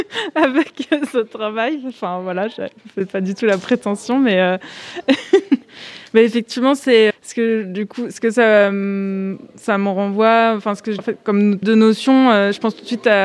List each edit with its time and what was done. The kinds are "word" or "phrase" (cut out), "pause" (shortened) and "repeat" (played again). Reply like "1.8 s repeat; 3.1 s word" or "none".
7.1 s word; 11.0 s word; 11.6 s word